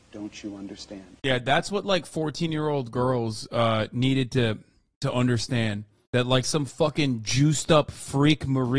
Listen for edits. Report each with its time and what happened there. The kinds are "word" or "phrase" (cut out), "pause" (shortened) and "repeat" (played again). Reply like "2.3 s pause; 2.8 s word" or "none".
1.2 s pause